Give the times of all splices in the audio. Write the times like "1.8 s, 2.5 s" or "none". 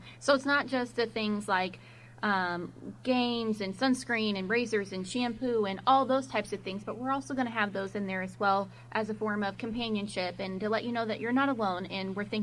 none